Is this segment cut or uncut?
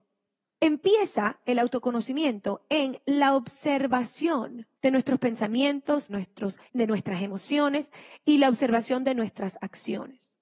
cut